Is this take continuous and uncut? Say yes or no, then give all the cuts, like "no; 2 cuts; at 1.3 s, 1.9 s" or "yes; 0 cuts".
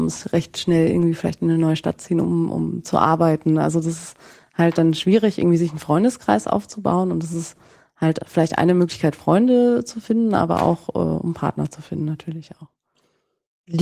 yes; 0 cuts